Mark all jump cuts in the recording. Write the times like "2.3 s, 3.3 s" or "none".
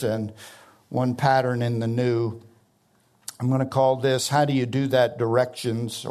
none